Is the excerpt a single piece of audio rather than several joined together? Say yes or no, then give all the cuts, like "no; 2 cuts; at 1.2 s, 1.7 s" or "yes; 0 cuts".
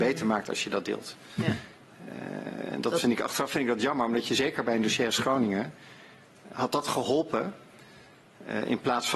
no; 1 cut; at 6.5 s